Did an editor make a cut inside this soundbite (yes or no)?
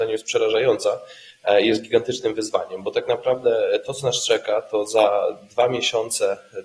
no